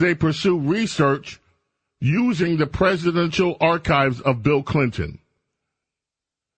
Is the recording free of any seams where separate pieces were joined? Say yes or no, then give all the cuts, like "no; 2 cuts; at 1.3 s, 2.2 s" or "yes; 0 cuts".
yes; 0 cuts